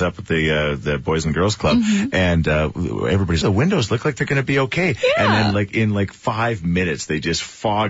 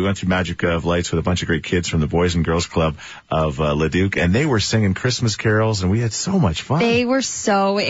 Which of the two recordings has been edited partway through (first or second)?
first